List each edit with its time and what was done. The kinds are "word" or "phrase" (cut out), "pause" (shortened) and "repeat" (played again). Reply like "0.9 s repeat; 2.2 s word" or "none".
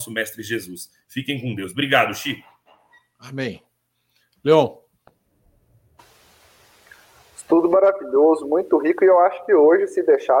none